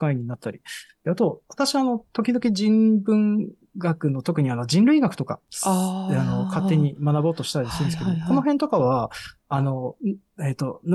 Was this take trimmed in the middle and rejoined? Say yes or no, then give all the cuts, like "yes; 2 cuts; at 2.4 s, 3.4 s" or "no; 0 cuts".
no; 0 cuts